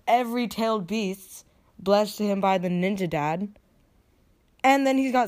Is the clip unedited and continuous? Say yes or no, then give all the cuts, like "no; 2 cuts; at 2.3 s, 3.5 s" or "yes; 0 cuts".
yes; 0 cuts